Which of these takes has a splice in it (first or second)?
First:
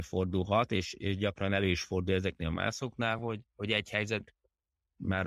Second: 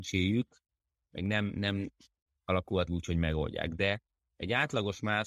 second